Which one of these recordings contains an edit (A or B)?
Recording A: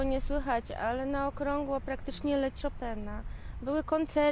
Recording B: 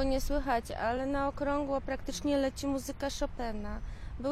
A